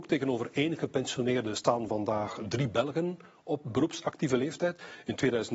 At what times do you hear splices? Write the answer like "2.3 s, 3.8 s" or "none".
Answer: none